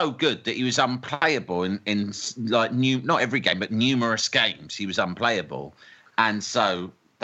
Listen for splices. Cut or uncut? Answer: uncut